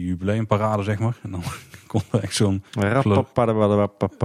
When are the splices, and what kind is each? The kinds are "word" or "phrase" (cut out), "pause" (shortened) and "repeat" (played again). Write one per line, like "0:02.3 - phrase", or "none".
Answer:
0:02.7 - pause